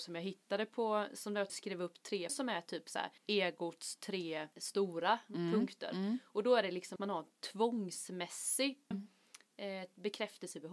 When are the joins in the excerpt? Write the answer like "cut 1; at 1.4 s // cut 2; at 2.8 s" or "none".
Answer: cut 1; at 1.5 s // cut 2; at 2.3 s // cut 3; at 3.2 s // cut 4; at 4.5 s // cut 5; at 7.0 s // cut 6; at 8.9 s

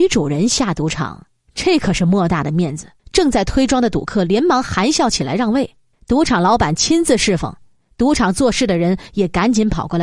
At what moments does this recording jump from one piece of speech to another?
cut 1; at 3.0 s // cut 2; at 5.9 s

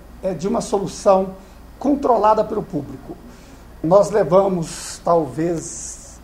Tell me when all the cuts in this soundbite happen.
cut 1; at 2.6 s

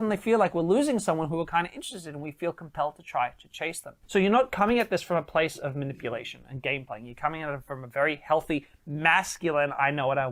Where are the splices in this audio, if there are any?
cut 1; at 4.0 s

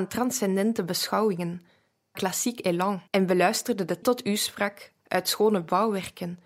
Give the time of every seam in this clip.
cut 1; at 2.1 s // cut 2; at 3.1 s // cut 3; at 4.0 s

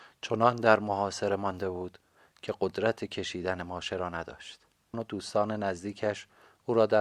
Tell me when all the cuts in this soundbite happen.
cut 1; at 4.9 s

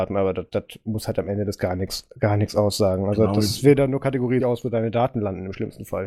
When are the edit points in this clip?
cut 1; at 1.6 s // cut 2; at 4.4 s

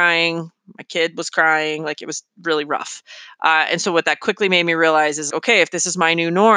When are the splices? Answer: cut 1; at 5.3 s

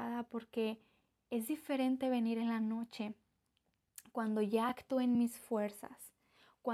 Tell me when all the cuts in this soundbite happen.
none

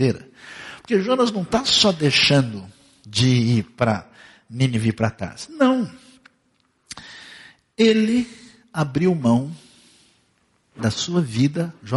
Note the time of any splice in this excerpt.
none

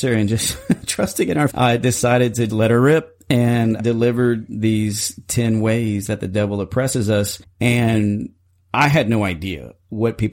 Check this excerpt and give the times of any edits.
cut 1; at 1.5 s // cut 2; at 2.5 s // cut 3; at 3.8 s // cut 4; at 7.4 s

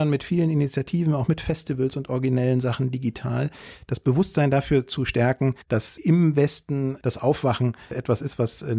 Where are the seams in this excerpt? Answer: cut 1; at 5.6 s

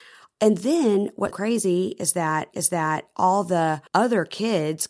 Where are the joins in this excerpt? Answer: cut 1; at 1.3 s // cut 2; at 2.5 s // cut 3; at 3.9 s

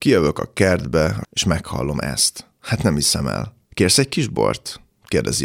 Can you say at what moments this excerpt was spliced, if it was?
cut 1; at 1.2 s // cut 2; at 3.6 s

